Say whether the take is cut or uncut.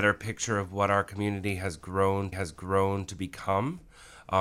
cut